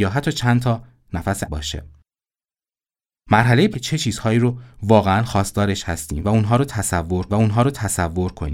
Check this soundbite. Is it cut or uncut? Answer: cut